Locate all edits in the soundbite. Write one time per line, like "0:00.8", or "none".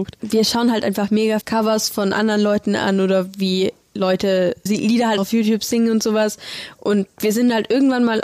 0:01.4
0:04.7
0:05.2